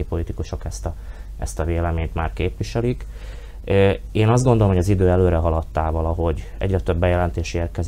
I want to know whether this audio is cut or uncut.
uncut